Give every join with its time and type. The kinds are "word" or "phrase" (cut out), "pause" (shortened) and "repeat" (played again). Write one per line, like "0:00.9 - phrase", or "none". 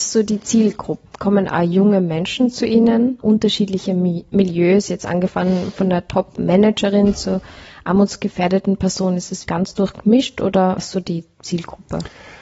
0:03.2 - word
0:09.4 - word
0:10.8 - word